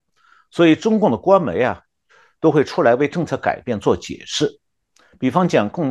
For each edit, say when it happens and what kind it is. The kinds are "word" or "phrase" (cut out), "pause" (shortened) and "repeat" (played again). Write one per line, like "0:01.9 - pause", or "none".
none